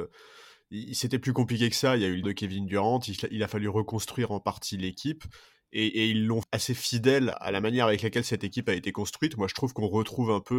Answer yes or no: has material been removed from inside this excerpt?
yes